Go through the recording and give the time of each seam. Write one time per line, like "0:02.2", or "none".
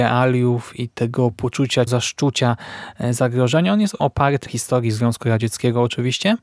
0:01.9
0:04.0
0:04.5